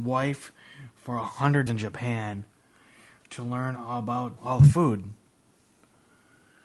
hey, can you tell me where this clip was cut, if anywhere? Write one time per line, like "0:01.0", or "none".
0:01.7
0:04.4